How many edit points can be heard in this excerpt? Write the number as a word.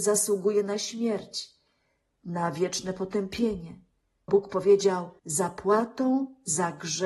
two